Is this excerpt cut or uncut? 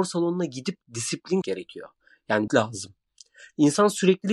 cut